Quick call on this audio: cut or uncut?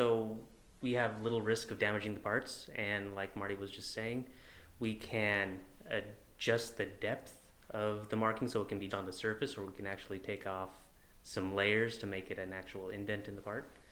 cut